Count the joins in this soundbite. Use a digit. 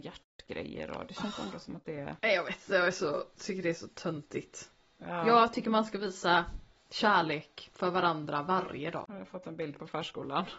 2